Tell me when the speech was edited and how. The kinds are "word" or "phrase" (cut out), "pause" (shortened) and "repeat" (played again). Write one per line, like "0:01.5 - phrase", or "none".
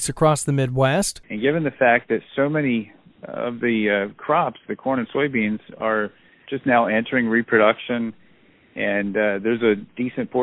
none